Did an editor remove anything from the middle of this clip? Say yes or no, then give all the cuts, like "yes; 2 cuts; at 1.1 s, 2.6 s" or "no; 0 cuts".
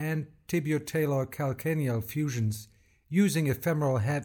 no; 0 cuts